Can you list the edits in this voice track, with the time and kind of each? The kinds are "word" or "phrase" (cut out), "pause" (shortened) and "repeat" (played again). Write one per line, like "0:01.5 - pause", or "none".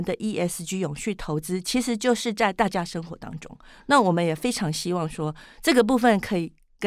none